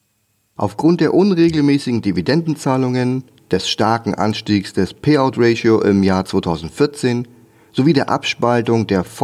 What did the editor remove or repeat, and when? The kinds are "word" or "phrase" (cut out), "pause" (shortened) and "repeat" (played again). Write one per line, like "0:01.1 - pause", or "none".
none

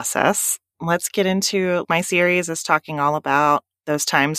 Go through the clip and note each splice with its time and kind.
0:01.8 - word

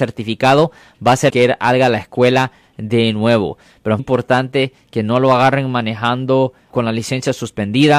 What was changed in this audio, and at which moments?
0:01.3 - word
0:04.0 - word
0:06.7 - word

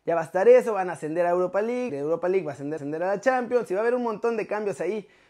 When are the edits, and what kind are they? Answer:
0:01.9 - word
0:02.8 - repeat

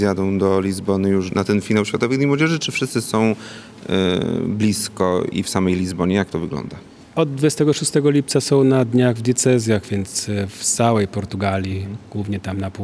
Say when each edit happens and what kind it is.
0:01.3 - word
0:05.3 - word

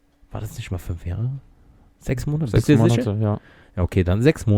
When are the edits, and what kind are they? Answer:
none

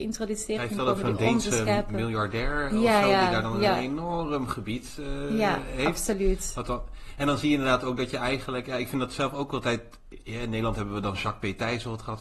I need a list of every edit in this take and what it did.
none

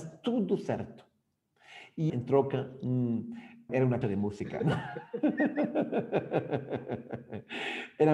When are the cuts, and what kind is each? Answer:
0:02.1 - word
0:03.7 - word
0:04.0 - word

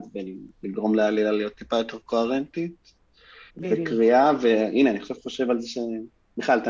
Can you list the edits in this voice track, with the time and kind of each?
0:03.5 - pause

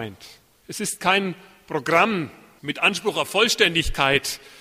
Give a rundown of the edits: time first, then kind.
none

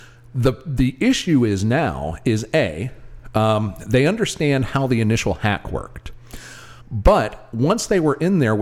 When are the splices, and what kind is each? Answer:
0:06.8 - pause

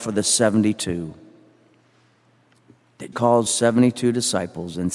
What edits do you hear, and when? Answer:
0:03.1 - word
0:03.5 - word

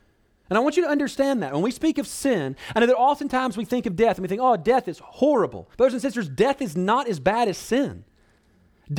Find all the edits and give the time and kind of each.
0:05.7 - pause

